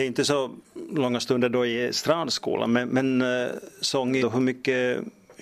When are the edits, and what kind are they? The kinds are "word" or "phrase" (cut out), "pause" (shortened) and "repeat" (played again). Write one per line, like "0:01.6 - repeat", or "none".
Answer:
0:04.2 - word